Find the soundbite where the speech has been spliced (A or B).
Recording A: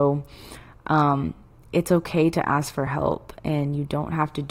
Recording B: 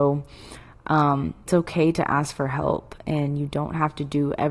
B